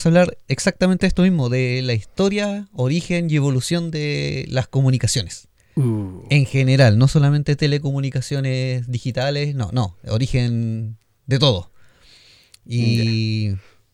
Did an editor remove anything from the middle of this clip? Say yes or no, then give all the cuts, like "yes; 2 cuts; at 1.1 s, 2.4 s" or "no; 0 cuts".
no; 0 cuts